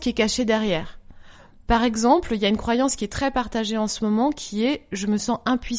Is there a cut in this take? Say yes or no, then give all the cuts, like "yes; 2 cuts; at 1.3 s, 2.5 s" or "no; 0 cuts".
no; 0 cuts